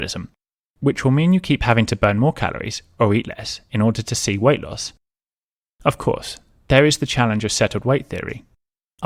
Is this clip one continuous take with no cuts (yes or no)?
yes